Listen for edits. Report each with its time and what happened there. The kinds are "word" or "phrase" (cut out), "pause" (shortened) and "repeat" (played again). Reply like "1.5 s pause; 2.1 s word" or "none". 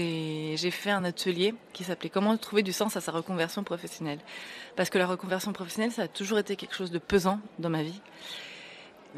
none

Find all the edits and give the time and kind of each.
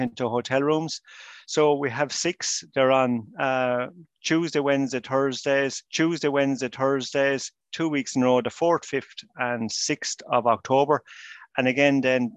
5.9 s repeat

